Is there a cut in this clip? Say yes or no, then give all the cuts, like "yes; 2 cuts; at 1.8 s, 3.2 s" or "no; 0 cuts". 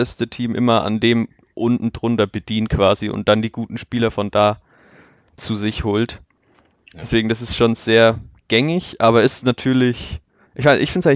no; 0 cuts